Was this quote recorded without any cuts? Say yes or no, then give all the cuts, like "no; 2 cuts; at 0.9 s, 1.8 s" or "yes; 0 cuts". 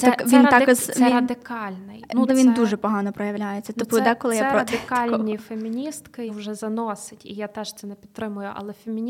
no; 2 cuts; at 2.3 s, 6.3 s